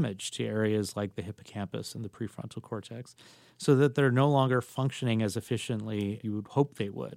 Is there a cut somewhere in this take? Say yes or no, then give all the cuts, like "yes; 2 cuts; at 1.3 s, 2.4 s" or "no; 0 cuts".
yes; 1 cut; at 6.2 s